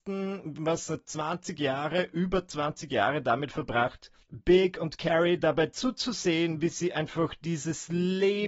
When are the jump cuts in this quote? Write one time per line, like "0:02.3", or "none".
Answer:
0:04.2